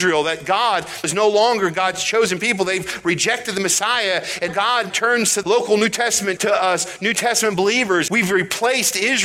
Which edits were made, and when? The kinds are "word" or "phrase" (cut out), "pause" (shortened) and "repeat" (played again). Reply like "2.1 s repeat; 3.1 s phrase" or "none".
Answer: 1.0 s word; 4.5 s word; 4.9 s word; 5.4 s word; 6.4 s word; 8.1 s word